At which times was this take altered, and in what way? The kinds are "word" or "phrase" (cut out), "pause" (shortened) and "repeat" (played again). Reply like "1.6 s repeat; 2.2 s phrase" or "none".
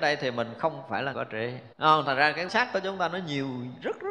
1.1 s word; 1.7 s pause; 2.5 s word

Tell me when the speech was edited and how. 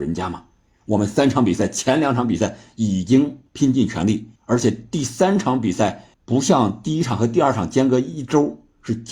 3.5 s pause; 4.4 s pause; 6.1 s pause

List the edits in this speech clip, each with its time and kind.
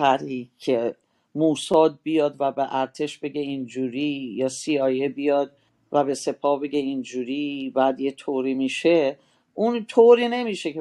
none

